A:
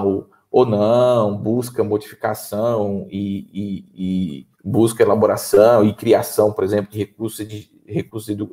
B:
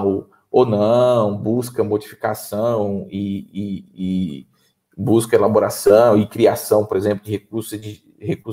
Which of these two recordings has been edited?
A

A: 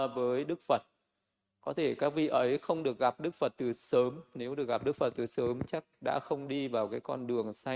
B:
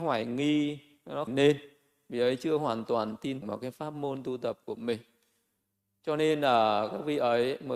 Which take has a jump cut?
B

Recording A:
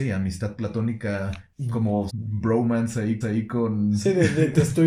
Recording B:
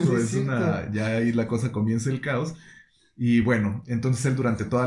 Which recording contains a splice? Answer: A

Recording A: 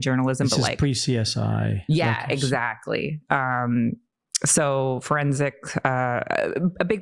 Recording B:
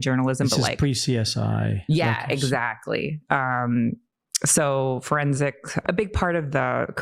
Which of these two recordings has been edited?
B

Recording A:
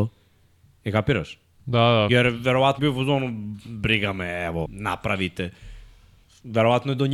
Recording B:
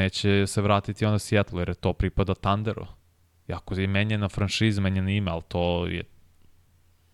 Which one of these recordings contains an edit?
A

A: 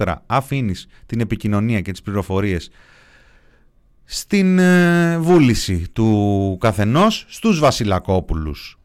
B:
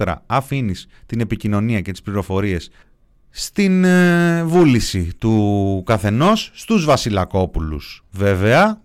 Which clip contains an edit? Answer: B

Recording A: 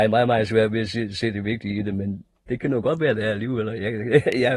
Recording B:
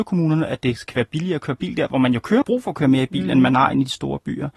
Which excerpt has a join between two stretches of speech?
B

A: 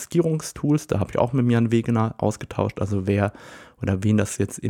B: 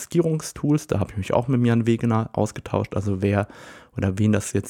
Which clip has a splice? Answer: A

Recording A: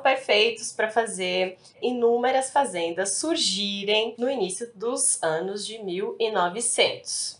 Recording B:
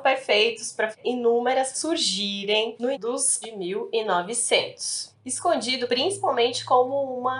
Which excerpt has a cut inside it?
B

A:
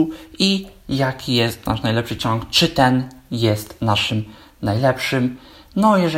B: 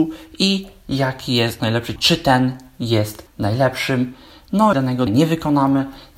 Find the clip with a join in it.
B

